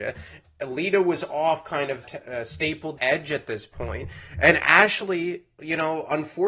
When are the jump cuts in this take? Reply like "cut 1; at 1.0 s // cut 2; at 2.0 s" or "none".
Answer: cut 1; at 2.0 s // cut 2; at 3.0 s